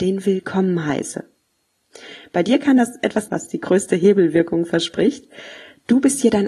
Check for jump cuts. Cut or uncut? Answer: cut